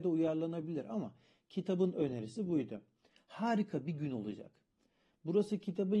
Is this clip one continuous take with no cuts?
yes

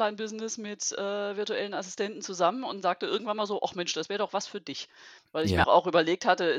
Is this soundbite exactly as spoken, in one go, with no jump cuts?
no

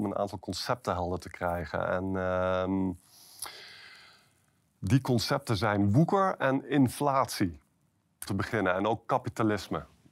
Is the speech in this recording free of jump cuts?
no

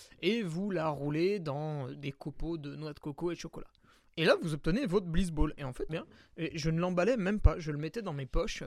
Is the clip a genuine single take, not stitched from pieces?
no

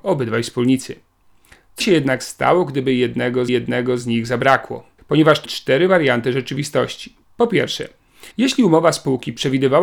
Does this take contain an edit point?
yes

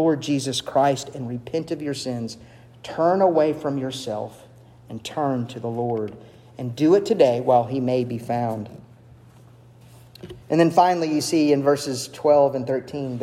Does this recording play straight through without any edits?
no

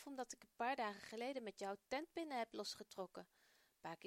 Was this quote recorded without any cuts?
yes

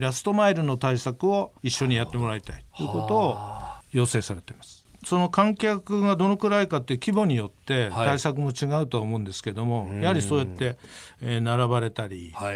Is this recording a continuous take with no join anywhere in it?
no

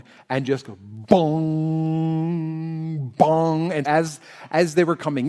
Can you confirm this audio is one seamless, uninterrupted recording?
no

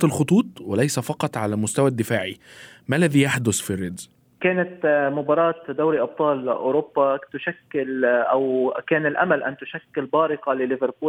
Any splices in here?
no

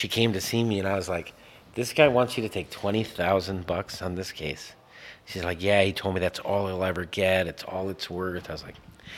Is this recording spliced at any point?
no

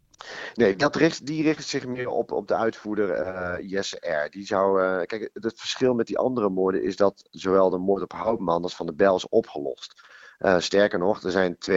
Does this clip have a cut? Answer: no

